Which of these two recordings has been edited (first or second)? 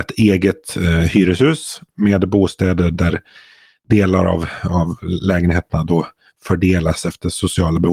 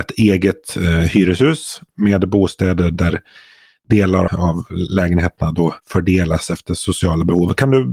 second